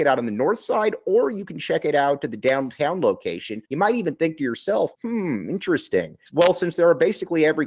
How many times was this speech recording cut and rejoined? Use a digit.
3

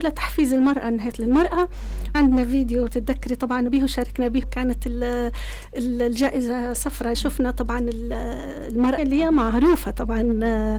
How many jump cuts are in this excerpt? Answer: 7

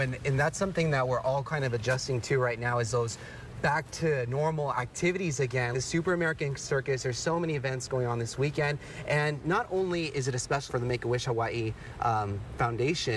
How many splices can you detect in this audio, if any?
2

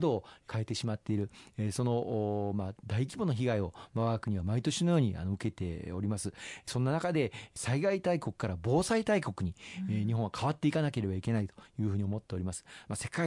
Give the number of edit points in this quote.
1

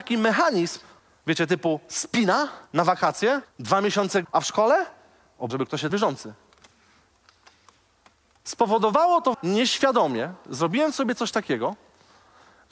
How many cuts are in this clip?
7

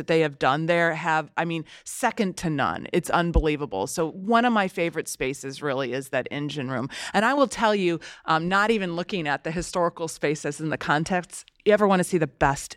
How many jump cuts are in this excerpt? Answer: 0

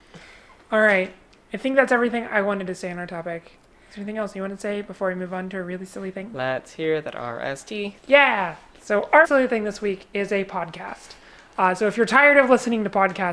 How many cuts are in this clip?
3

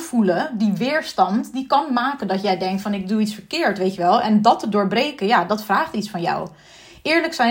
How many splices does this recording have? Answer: 0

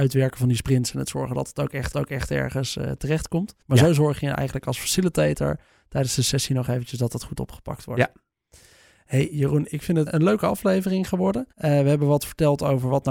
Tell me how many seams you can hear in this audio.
4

